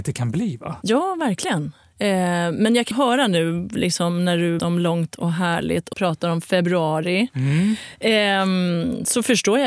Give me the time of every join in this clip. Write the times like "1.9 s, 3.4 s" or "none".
2.9 s, 4.6 s, 5.9 s